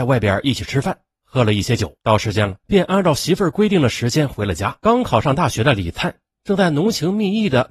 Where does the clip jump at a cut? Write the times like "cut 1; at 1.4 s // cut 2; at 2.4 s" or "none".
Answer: cut 1; at 2.0 s // cut 2; at 2.6 s // cut 3; at 4.8 s

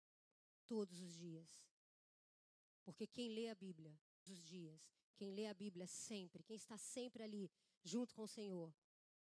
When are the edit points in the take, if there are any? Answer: cut 1; at 4.3 s

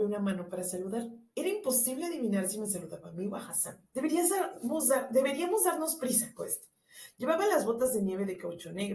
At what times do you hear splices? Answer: cut 1; at 3.9 s // cut 2; at 6.4 s

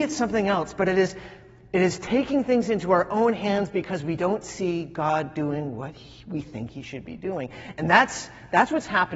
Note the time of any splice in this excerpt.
none

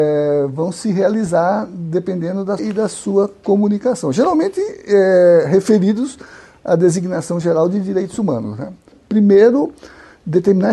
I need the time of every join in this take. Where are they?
cut 1; at 2.6 s

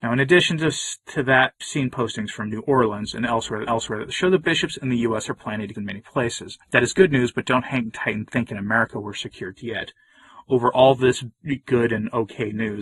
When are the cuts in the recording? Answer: cut 1; at 1.6 s // cut 2; at 3.7 s // cut 3; at 5.7 s // cut 4; at 6.6 s // cut 5; at 9.6 s

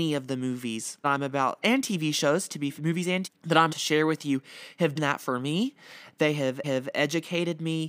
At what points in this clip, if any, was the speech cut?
cut 1; at 1.0 s // cut 2; at 1.6 s // cut 3; at 2.8 s // cut 4; at 3.2 s // cut 5; at 3.7 s // cut 6; at 5.0 s // cut 7; at 6.6 s

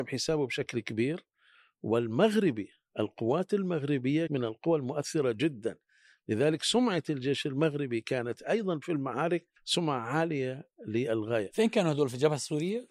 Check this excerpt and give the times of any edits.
cut 1; at 4.3 s // cut 2; at 9.6 s

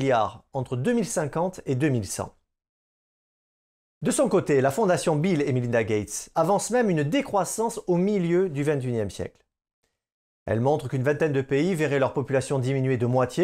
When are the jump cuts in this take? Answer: none

